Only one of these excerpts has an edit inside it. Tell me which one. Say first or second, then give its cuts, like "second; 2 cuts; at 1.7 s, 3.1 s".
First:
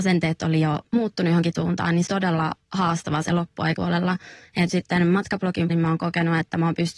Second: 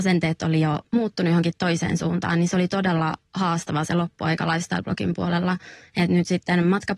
first; 5 cuts; at 1.5 s, 2.1 s, 3.8 s, 4.7 s, 5.7 s